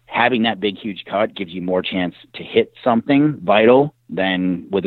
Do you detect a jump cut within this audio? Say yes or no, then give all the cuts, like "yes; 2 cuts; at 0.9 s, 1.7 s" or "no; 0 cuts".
no; 0 cuts